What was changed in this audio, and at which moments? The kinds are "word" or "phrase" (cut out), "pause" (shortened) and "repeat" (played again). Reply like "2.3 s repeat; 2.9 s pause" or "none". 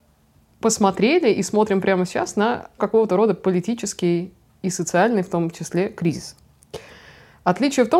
2.8 s word